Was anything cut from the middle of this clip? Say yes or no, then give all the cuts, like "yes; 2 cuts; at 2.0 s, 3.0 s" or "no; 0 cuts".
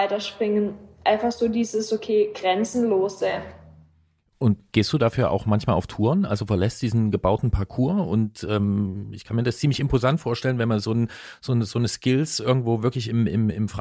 no; 0 cuts